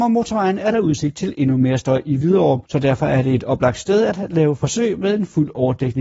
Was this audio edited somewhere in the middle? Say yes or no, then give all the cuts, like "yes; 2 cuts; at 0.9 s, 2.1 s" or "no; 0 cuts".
yes; 1 cut; at 2.7 s